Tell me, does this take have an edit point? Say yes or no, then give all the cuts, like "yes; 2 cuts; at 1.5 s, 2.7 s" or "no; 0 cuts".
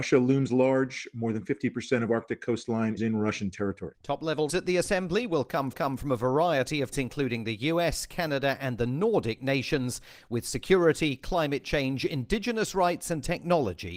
yes; 4 cuts; at 3.0 s, 4.5 s, 5.7 s, 6.9 s